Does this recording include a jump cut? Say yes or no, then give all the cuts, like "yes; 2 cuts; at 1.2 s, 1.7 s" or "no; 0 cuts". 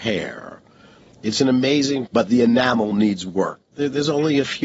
yes; 1 cut; at 2.1 s